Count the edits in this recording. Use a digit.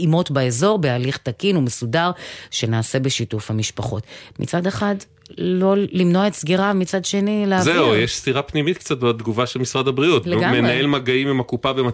0